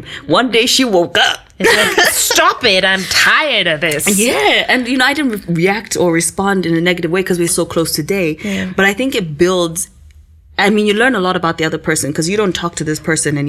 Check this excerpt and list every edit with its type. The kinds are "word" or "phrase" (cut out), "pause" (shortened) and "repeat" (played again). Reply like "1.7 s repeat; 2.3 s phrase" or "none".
7.5 s word